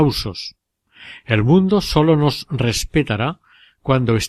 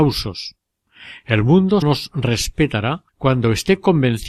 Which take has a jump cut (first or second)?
second